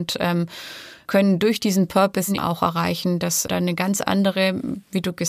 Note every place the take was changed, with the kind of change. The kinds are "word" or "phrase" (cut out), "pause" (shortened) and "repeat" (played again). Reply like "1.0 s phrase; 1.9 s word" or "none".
1.0 s word; 2.4 s word; 3.5 s word

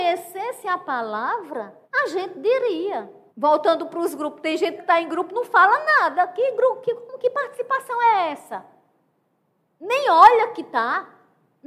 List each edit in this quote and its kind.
1.8 s pause; 3.3 s pause; 4.8 s word

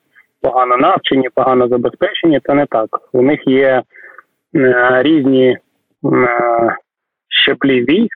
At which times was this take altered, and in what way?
none

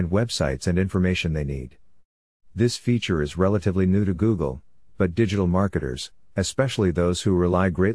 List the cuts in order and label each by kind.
none

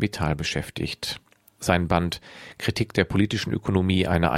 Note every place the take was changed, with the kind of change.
none

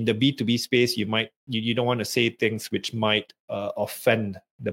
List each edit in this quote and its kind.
none

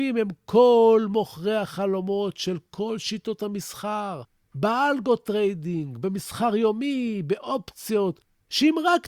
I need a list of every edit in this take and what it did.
none

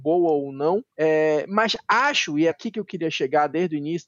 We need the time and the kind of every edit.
0.9 s pause; 2.5 s word

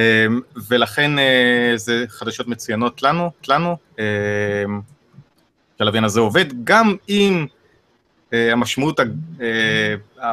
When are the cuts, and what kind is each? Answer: 3.4 s repeat

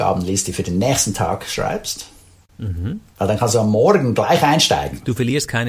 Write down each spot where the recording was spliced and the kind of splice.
none

